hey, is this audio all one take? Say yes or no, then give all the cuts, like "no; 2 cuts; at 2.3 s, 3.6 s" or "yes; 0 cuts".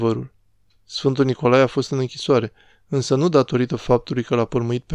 yes; 0 cuts